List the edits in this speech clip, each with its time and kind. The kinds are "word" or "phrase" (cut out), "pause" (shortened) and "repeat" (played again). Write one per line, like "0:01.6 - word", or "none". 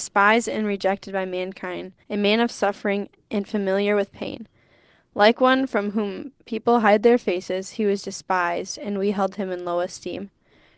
0:02.0 - pause